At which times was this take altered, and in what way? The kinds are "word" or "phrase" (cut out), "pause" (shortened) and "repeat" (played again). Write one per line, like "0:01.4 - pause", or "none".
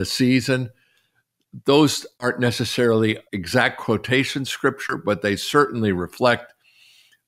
0:03.3 - pause
0:04.5 - word